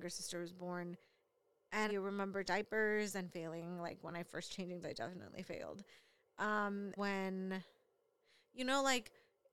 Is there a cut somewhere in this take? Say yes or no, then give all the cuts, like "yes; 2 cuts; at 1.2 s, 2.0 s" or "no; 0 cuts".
yes; 5 cuts; at 1.9 s, 2.4 s, 4.5 s, 4.8 s, 7.0 s